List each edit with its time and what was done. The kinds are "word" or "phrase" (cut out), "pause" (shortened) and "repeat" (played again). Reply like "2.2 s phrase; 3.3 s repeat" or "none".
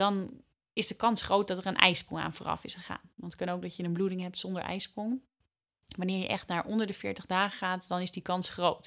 none